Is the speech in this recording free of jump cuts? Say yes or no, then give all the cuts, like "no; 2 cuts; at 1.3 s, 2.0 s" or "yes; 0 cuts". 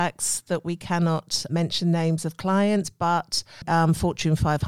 no; 2 cuts; at 1.5 s, 3.6 s